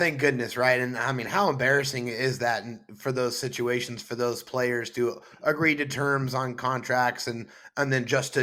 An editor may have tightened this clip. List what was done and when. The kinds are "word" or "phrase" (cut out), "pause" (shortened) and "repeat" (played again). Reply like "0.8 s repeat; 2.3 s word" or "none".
none